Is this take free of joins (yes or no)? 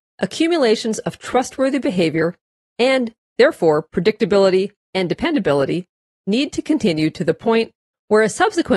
yes